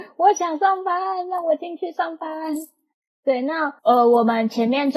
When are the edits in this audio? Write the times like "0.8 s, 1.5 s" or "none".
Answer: 3.8 s